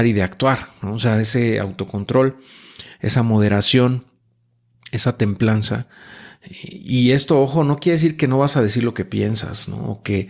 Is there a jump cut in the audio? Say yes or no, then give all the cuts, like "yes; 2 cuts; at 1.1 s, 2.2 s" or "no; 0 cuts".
no; 0 cuts